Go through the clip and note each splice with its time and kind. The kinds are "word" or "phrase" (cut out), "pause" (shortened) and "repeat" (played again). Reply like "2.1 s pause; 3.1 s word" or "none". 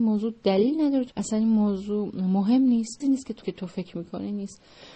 1.1 s phrase; 3.0 s word; 3.4 s phrase